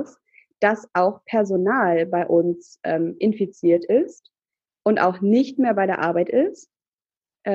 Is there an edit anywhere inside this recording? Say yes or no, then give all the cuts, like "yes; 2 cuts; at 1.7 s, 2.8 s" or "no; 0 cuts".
no; 0 cuts